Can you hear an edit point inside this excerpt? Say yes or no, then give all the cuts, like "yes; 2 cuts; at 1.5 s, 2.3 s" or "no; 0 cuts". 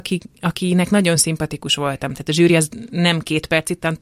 no; 0 cuts